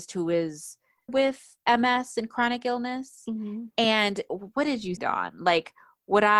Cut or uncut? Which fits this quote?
cut